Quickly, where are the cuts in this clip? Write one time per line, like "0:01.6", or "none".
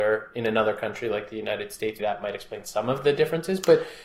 0:02.0